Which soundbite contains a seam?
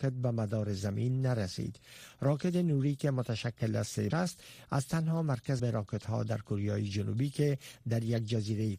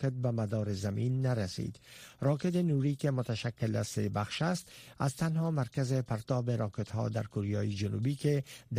first; 2 cuts; at 4.1 s, 5.6 s

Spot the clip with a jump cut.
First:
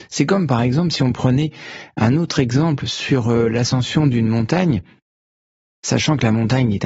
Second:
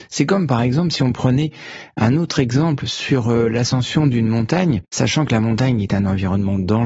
second; 1 cut; at 4.8 s

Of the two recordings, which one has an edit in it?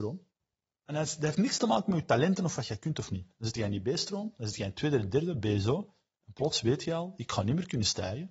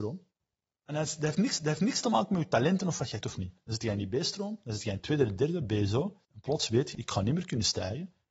second; 4 cuts; at 1.6 s, 3.2 s, 6.2 s, 6.9 s

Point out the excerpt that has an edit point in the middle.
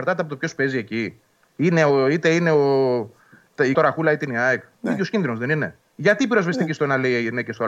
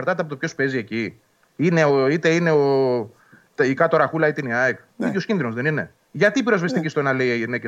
first; 1 cut; at 3.7 s

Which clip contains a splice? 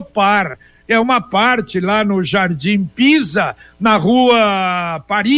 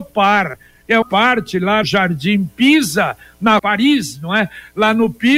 second; 3 cuts; at 1.0 s, 1.8 s, 3.6 s

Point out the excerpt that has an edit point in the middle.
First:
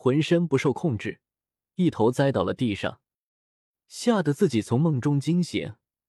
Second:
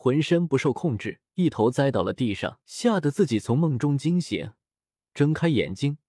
second; 2 cuts; at 1.3 s, 2.6 s

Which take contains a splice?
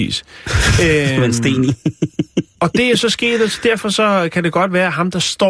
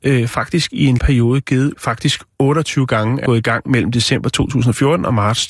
second; 3 cuts; at 1.0 s, 1.7 s, 3.3 s

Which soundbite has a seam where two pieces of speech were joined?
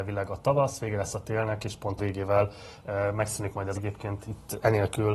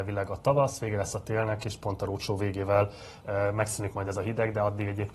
first; 2 cuts; at 2.0 s, 3.7 s

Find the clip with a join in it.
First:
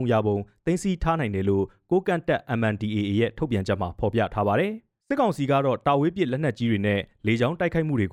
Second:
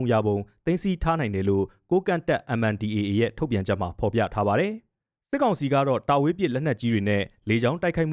first; 1 cut; at 5.0 s

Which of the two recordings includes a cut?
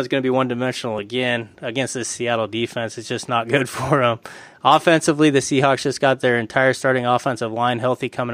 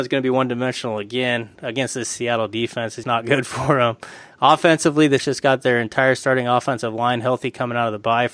second; 2 cuts; at 3.0 s, 5.2 s

